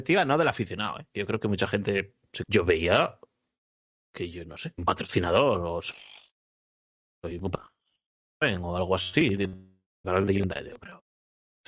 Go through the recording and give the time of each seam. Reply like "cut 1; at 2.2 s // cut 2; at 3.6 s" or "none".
cut 1; at 2.4 s // cut 2; at 4.8 s // cut 3; at 10.0 s